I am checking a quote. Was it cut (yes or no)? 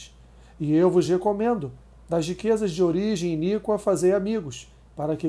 no